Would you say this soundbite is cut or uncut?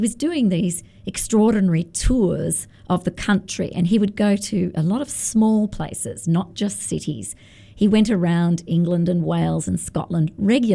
uncut